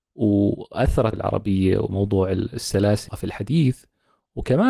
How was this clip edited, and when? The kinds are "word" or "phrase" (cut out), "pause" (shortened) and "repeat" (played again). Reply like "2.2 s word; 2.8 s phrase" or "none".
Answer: 1.1 s word; 3.1 s word

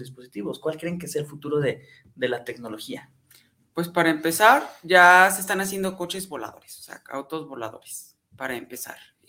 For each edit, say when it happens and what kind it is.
none

